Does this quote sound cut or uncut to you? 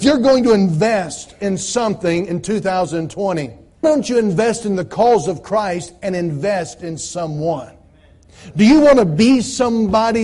cut